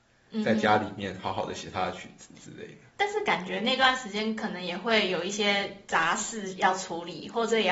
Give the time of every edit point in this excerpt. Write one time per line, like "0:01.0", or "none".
0:02.9